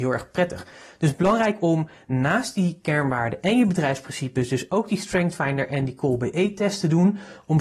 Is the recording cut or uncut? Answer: uncut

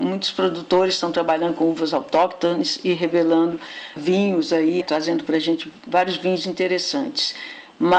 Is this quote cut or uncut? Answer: cut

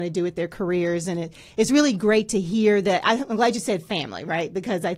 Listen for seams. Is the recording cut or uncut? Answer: uncut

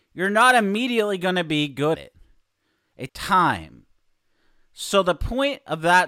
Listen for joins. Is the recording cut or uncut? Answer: cut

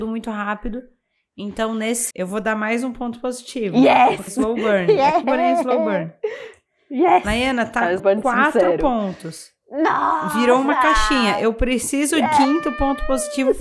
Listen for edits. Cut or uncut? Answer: cut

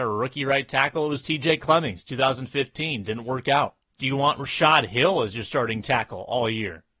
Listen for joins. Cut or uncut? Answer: cut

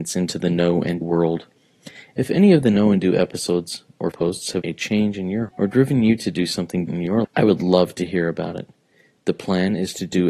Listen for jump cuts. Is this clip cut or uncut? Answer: cut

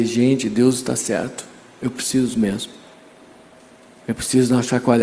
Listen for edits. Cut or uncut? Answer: uncut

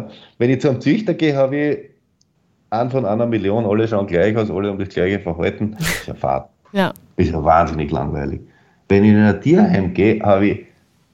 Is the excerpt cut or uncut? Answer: uncut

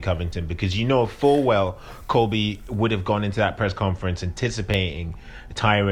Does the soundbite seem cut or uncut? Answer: uncut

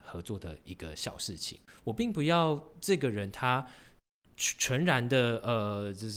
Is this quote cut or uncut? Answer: uncut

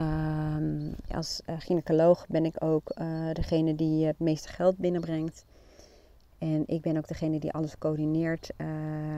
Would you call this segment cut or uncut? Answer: uncut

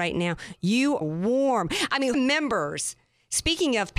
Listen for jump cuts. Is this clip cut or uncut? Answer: cut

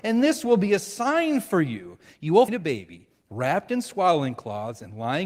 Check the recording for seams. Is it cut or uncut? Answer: cut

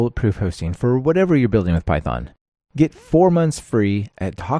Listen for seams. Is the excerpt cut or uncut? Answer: uncut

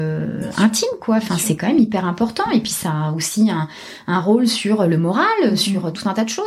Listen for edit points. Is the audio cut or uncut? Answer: uncut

